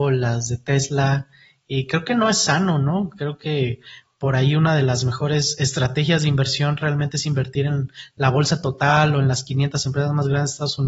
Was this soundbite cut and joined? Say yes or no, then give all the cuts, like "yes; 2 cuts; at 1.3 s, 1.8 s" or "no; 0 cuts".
no; 0 cuts